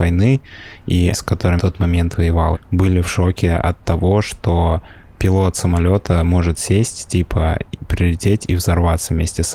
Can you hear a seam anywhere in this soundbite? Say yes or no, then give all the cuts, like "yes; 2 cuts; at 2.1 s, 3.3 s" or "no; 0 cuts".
yes; 3 cuts; at 1.1 s, 1.6 s, 2.5 s